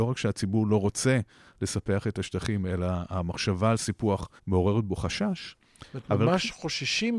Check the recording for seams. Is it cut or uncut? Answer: cut